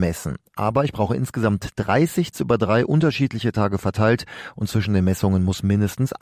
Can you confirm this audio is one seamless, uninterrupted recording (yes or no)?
no